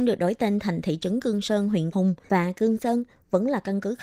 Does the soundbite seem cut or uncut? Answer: cut